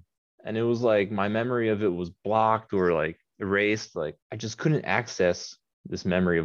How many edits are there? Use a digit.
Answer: 1